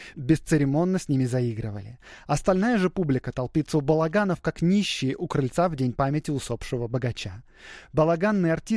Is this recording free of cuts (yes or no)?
yes